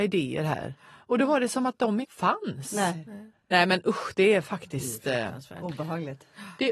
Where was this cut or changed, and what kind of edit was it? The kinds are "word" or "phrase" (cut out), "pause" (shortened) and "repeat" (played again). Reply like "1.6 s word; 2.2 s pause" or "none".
2.0 s word; 3.3 s pause